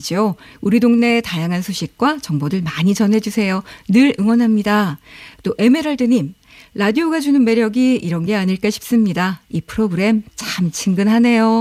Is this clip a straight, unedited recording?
yes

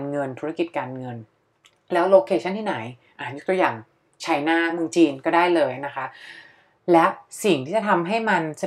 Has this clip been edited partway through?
no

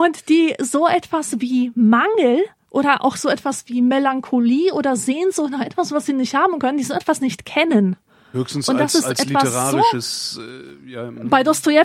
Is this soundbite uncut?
yes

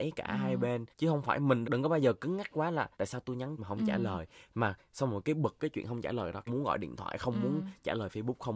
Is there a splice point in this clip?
yes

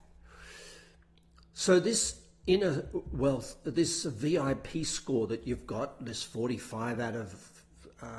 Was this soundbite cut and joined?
no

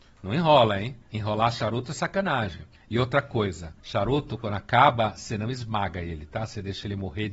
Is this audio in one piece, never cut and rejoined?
no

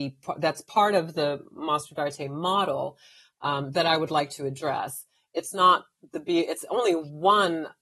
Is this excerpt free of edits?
yes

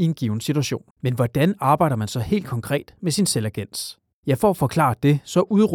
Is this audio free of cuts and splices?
no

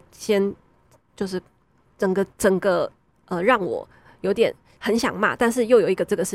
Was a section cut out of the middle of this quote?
no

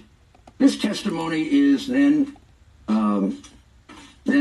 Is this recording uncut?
yes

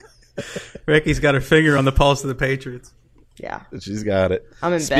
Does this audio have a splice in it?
no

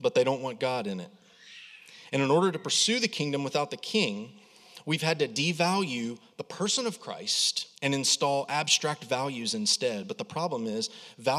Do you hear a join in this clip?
yes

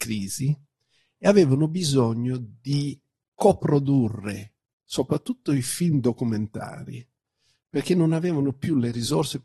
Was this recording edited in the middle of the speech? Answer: no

